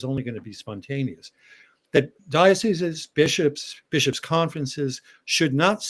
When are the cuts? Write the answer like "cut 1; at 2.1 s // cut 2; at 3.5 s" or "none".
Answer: cut 1; at 2.2 s